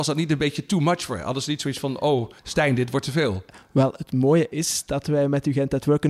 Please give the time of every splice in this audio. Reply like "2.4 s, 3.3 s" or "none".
2.4 s